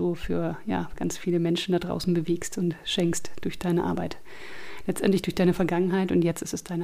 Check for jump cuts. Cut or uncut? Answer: uncut